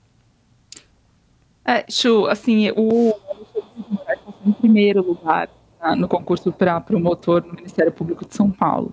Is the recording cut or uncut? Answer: uncut